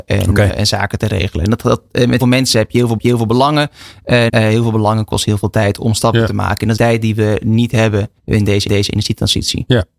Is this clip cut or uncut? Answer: cut